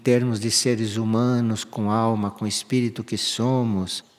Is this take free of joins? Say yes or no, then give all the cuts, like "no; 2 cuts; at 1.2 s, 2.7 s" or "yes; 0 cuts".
yes; 0 cuts